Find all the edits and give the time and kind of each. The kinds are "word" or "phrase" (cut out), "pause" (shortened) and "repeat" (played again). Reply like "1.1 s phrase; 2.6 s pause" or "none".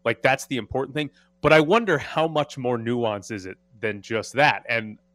none